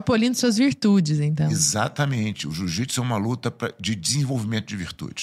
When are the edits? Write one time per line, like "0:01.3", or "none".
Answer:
none